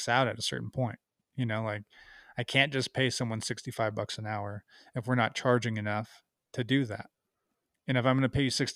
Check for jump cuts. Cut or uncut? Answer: uncut